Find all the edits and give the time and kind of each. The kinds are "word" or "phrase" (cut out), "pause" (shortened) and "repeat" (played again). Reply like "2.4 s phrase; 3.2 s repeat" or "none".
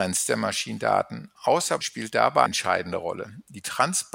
1.8 s word; 2.5 s word

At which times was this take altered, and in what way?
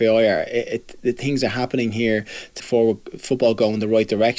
2.6 s word

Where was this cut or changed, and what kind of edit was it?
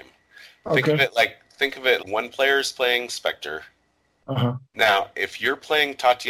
2.0 s word; 4.7 s pause

